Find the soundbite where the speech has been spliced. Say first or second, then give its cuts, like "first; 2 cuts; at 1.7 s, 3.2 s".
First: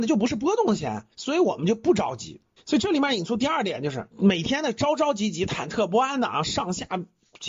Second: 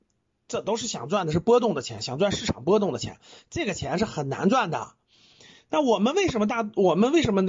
first; 3 cuts; at 1.1 s, 2.6 s, 4.1 s